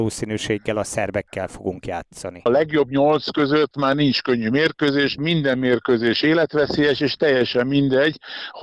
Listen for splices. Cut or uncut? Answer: uncut